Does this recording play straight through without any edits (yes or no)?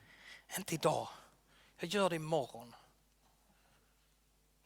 yes